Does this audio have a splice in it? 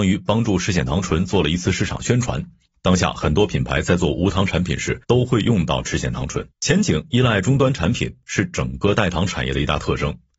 yes; 2 cuts; at 5.0 s, 6.5 s

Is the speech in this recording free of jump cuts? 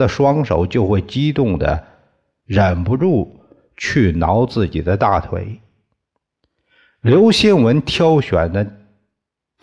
yes; 0 cuts

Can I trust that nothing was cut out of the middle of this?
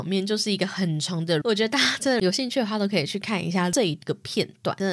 no; 1 cut; at 1.4 s

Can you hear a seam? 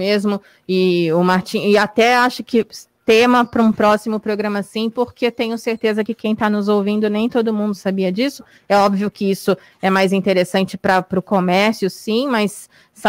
no; 0 cuts

